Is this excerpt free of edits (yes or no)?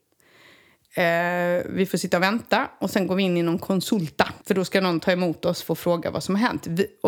no